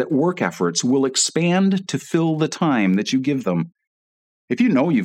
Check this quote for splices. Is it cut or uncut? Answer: uncut